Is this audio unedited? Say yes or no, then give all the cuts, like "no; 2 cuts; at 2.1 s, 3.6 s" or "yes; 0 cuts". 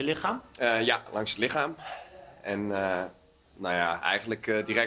yes; 0 cuts